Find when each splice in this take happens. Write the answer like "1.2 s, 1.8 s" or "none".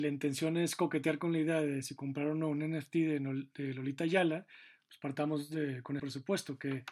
6.0 s